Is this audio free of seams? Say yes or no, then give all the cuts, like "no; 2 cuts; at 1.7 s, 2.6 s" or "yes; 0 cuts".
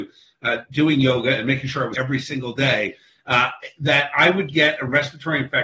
no; 1 cut; at 1.9 s